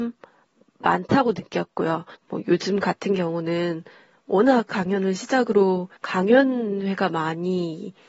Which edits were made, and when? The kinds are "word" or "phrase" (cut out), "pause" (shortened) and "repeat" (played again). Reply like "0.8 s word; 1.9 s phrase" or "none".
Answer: 2.1 s pause; 4.7 s word; 6.0 s pause